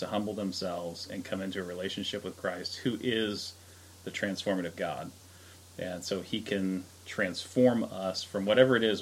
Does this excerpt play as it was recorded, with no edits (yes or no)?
yes